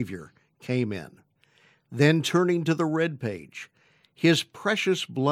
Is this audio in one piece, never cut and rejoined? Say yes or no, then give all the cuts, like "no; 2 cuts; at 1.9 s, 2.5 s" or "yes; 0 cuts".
yes; 0 cuts